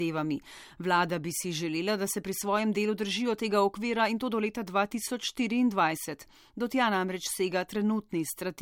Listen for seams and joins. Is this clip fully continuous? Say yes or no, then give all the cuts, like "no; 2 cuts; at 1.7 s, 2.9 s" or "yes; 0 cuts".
yes; 0 cuts